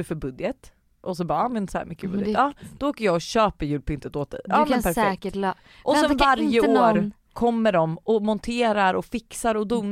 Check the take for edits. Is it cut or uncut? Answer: uncut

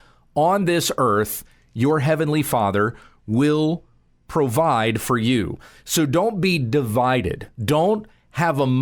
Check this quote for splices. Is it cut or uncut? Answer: uncut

